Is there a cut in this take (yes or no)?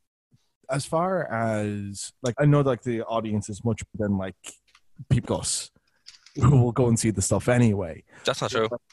yes